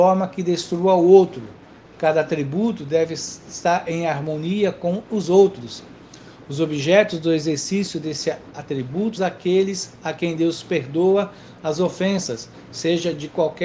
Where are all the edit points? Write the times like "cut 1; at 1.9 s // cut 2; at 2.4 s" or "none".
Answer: cut 1; at 9.2 s